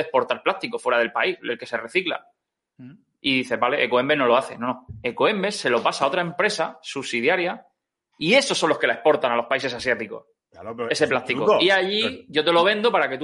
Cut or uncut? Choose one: uncut